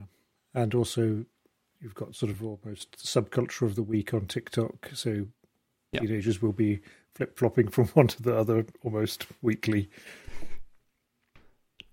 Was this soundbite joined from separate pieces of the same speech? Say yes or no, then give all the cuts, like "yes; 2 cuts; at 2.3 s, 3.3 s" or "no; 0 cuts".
no; 0 cuts